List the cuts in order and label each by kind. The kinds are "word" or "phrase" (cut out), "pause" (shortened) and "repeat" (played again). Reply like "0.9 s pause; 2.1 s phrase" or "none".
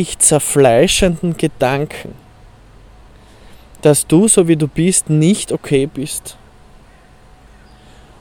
none